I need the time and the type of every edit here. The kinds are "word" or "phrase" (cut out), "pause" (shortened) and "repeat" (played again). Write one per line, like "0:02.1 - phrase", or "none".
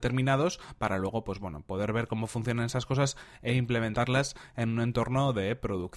none